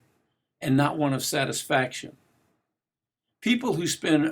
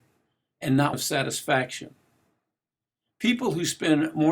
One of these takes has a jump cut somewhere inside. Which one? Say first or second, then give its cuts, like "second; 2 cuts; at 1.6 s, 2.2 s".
second; 1 cut; at 0.9 s